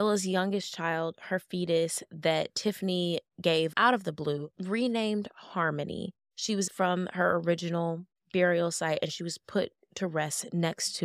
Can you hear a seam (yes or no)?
yes